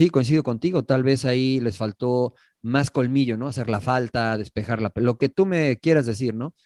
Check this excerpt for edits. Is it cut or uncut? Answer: uncut